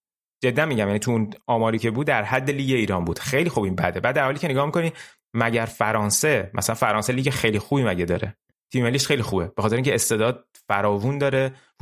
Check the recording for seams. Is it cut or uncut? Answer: uncut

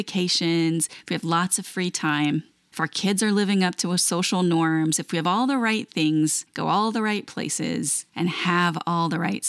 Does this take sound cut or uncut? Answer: uncut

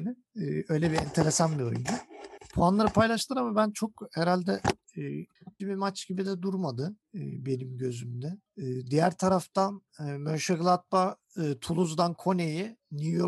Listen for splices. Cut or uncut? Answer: cut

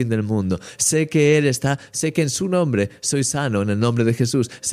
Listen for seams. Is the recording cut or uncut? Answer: uncut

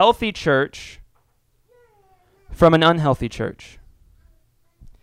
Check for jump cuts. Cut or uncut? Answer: uncut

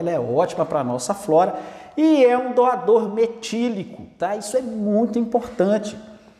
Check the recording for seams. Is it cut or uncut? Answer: uncut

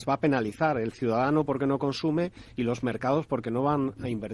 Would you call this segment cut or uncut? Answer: uncut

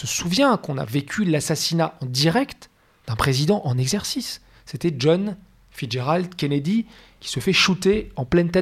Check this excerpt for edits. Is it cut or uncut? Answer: uncut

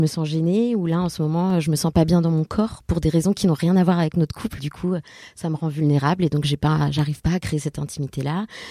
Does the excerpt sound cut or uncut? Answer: cut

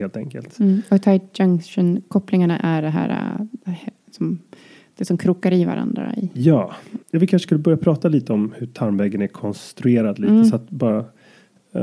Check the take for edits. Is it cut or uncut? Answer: uncut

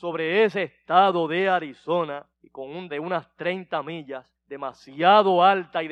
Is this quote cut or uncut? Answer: cut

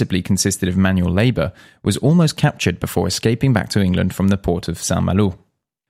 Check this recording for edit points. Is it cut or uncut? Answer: uncut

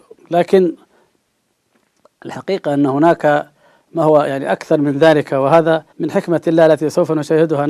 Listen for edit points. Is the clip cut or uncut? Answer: cut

